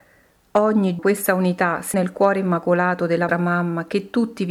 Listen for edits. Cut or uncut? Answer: cut